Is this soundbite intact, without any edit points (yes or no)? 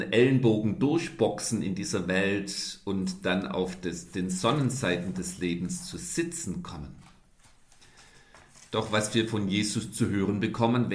yes